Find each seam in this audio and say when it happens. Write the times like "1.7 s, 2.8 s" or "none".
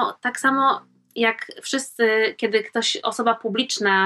none

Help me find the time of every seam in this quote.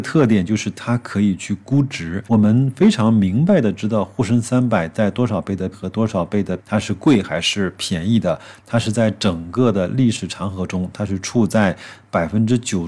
2.3 s, 5.7 s, 6.6 s

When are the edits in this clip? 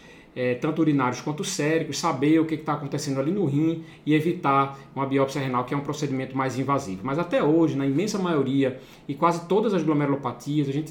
none

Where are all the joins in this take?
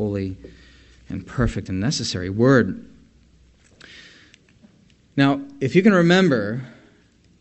none

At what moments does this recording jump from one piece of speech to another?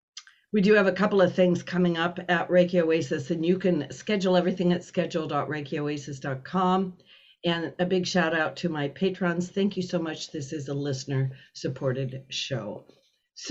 none

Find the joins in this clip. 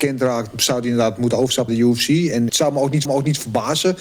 1.7 s, 2.5 s, 3.1 s

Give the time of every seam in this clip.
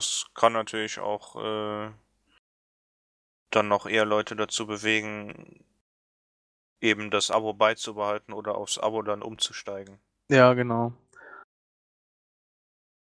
none

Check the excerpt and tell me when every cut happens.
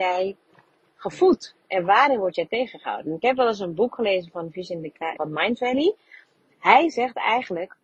5.2 s

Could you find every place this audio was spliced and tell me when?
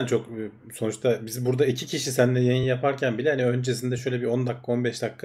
none

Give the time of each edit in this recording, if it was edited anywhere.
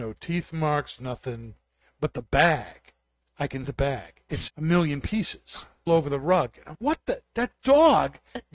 1.0 s, 3.6 s, 4.5 s, 5.9 s, 6.7 s

